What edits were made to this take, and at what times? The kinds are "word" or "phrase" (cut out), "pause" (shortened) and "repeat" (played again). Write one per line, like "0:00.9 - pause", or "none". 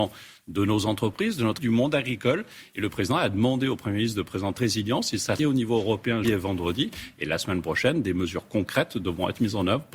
0:01.6 - word
0:04.6 - phrase
0:05.4 - word
0:06.2 - word